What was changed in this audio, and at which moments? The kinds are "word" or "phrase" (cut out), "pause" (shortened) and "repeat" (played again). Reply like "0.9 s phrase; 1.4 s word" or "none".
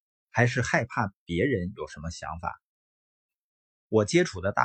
none